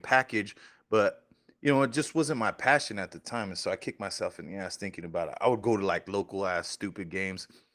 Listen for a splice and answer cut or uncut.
uncut